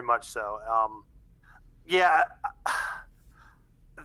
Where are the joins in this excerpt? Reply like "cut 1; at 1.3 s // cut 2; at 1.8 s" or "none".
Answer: none